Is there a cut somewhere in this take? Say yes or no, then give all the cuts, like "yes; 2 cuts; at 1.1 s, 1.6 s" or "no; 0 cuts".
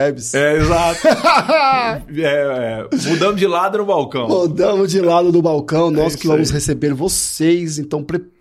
no; 0 cuts